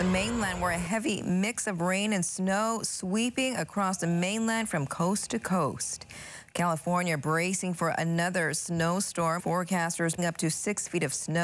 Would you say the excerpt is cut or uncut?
cut